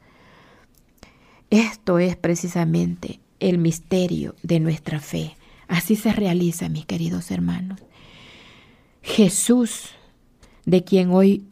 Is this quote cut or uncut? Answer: uncut